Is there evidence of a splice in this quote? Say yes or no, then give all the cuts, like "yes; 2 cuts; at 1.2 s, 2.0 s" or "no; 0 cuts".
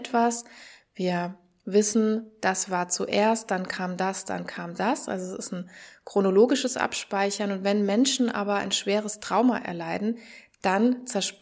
no; 0 cuts